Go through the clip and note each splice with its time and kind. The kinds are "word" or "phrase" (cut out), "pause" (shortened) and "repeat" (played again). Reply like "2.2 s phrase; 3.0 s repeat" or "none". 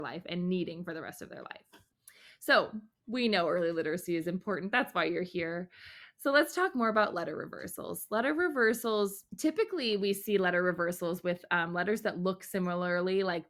9.3 s pause